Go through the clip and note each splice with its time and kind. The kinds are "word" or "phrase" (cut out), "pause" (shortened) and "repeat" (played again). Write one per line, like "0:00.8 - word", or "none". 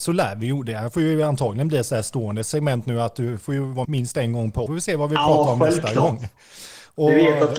0:03.8 - word
0:04.7 - phrase